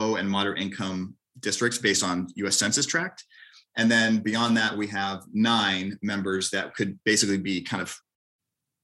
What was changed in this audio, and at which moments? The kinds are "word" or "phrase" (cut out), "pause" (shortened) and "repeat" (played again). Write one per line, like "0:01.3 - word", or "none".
none